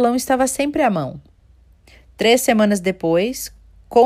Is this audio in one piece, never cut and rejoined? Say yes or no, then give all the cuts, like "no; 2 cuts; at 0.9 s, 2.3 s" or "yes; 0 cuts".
yes; 0 cuts